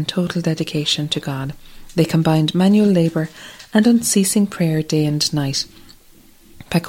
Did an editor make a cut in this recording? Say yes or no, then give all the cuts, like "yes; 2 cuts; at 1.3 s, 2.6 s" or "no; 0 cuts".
no; 0 cuts